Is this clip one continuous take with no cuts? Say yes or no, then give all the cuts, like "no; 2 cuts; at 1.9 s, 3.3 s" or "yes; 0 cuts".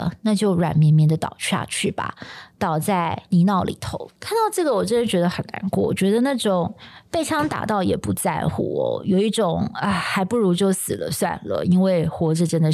no; 1 cut; at 4.2 s